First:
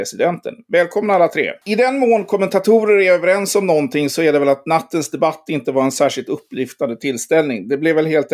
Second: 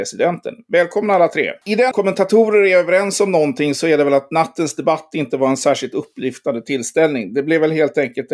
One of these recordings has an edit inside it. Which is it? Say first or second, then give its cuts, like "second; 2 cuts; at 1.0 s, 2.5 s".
second; 1 cut; at 1.9 s